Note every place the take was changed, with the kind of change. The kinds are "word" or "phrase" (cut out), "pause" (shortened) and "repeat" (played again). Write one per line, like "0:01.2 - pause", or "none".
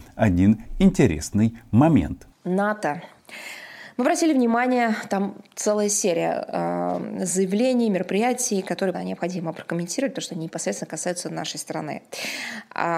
0:08.9 - word